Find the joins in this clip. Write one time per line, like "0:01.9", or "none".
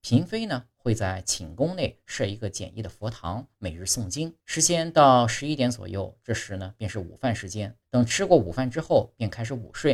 0:04.4
0:07.8